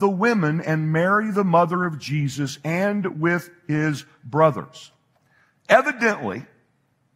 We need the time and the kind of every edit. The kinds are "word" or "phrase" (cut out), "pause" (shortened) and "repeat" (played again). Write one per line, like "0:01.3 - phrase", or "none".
none